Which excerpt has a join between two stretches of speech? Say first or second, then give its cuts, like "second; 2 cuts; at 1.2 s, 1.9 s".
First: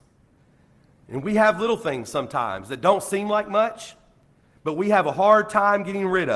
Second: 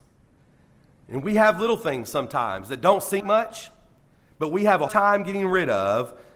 second; 2 cuts; at 3.2 s, 4.9 s